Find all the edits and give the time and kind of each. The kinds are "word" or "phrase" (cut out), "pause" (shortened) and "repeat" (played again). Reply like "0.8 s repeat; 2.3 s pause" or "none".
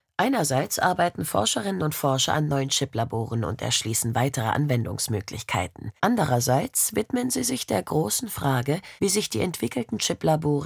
6.0 s pause; 9.0 s pause